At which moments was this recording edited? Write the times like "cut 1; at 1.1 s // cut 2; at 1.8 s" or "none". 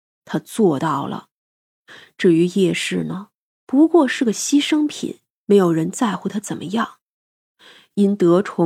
none